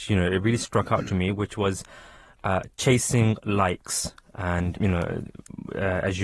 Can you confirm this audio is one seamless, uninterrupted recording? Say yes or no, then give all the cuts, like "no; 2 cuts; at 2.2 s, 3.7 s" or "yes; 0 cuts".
no; 1 cut; at 4.7 s